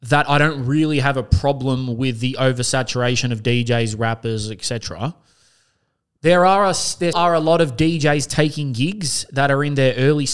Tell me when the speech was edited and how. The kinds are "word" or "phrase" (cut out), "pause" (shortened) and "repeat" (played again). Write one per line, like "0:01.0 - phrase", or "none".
0:07.1 - word